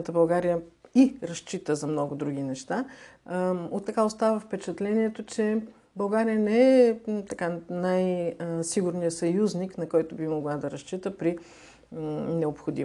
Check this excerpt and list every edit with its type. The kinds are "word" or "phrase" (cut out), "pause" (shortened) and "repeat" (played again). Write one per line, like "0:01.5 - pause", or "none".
0:03.9 - word